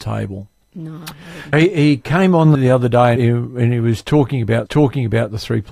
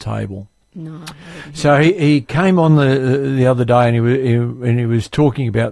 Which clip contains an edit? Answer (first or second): first